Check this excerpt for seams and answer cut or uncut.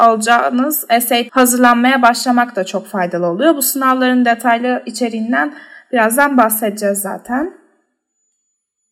cut